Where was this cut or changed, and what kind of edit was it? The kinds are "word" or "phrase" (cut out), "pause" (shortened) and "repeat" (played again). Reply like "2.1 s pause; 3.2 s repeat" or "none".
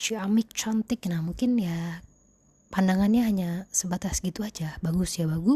none

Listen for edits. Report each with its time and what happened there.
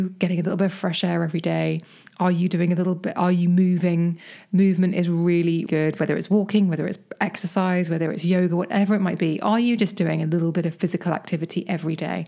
5.7 s word

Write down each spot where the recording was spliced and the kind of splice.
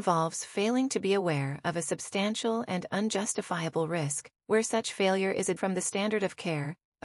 4.4 s pause; 5.6 s word

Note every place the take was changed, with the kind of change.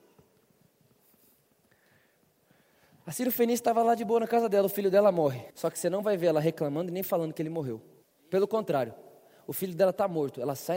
5.5 s pause; 8.0 s pause

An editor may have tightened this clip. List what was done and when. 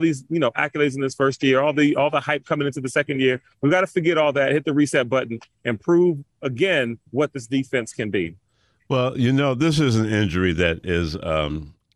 7.1 s pause

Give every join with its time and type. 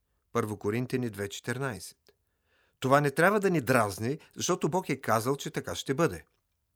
none

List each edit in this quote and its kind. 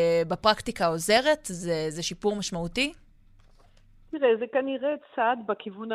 none

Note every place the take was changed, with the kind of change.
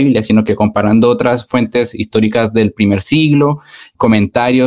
none

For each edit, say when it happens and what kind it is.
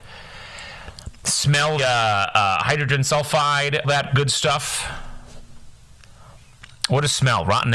1.8 s word; 3.8 s word

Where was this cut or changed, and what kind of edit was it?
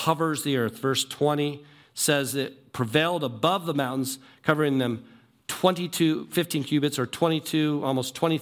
none

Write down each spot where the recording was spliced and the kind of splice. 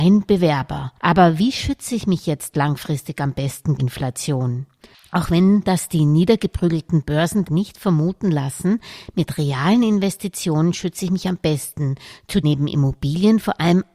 1.0 s pause; 3.8 s word; 7.4 s word; 12.4 s word

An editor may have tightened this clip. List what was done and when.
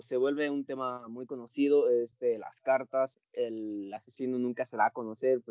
3.1 s word

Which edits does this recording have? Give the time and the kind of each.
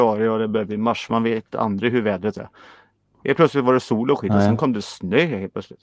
none

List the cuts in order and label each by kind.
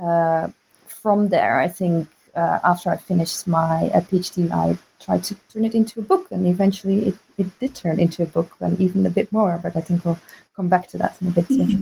4.5 s word; 5.0 s word

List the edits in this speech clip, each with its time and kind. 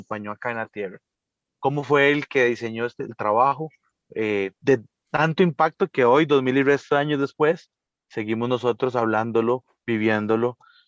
4.5 s pause

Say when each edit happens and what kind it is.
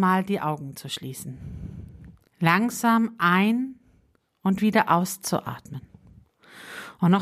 2.3 s pause

